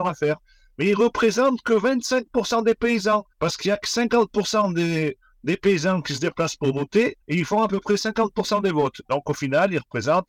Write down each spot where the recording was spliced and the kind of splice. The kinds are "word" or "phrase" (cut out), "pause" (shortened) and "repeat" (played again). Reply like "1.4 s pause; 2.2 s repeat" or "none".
3.3 s pause; 7.2 s pause

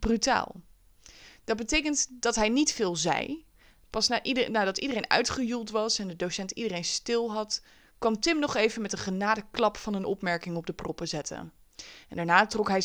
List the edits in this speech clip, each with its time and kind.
none

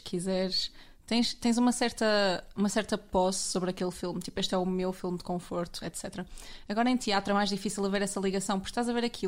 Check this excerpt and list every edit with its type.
none

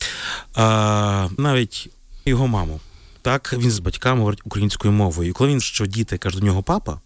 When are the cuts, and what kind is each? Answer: 1.4 s word; 2.3 s word; 3.8 s word; 5.6 s word

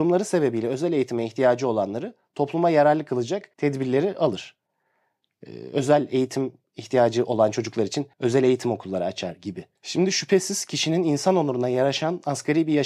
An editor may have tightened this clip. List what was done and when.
3.5 s pause; 8.1 s pause; 9.8 s pause

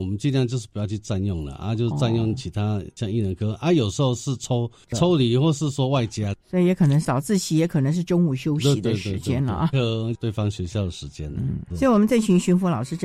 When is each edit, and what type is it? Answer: 6.4 s pause; 9.7 s phrase; 11.7 s word

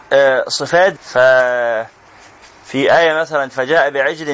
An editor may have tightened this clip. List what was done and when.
1.0 s word

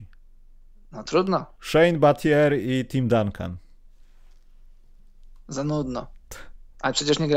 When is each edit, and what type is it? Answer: 1.5 s pause

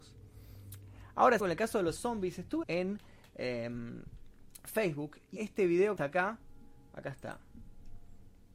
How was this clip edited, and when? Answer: 1.4 s word; 2.0 s word; 2.6 s word; 5.4 s word; 6.0 s word

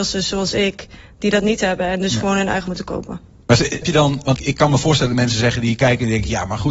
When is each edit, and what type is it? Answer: 2.7 s word; 3.8 s word; 4.4 s word

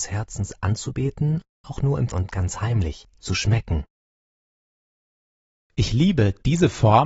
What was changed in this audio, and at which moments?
1.6 s phrase; 2.1 s word

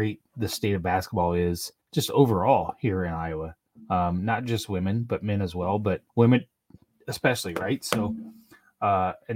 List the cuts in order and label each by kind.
1.8 s pause; 6.1 s pause

